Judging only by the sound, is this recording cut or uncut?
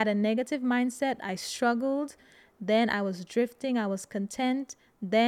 uncut